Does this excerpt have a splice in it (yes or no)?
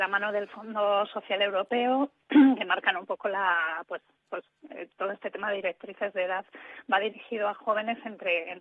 no